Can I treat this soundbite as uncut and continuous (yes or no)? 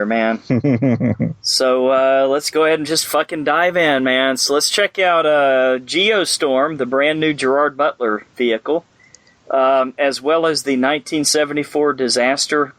yes